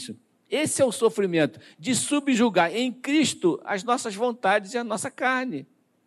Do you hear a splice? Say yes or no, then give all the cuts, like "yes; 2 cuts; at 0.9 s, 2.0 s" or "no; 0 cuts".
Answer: no; 0 cuts